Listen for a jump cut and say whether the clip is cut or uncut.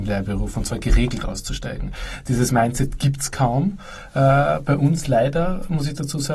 uncut